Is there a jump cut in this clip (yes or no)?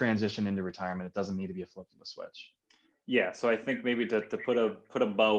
no